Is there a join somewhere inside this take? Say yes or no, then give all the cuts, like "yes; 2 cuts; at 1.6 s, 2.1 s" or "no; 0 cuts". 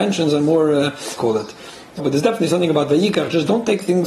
yes; 2 cuts; at 1.2 s, 2.0 s